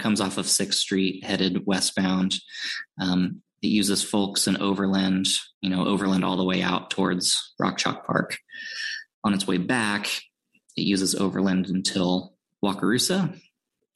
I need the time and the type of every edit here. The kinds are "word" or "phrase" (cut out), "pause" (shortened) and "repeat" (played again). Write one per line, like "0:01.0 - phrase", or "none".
0:05.5 - pause
0:09.1 - pause